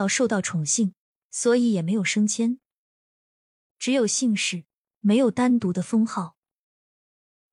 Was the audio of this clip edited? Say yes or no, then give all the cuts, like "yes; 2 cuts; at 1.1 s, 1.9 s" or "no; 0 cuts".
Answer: no; 0 cuts